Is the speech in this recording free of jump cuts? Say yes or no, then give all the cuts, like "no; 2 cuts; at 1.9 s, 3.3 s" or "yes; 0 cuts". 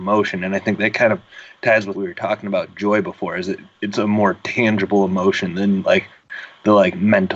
no; 1 cut; at 1.9 s